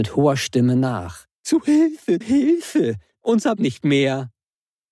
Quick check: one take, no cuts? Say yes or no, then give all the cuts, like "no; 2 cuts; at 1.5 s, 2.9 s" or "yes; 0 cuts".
no; 3 cuts; at 1.3 s, 2.2 s, 3.6 s